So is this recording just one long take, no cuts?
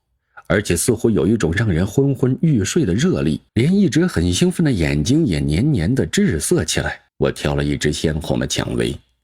no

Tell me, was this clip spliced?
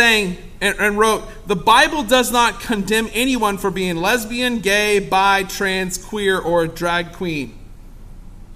no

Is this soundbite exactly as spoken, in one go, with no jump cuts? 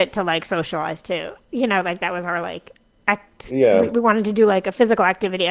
no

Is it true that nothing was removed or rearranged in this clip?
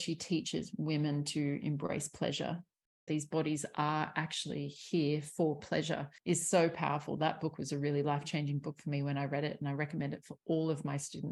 no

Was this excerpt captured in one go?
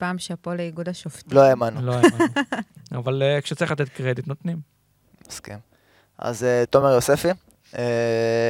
yes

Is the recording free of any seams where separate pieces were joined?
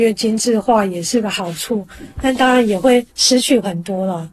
no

